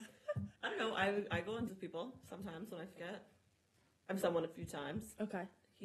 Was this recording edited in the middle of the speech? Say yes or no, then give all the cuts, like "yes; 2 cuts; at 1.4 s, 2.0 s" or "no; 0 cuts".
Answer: yes; 3 cuts; at 1.7 s, 3.0 s, 4.2 s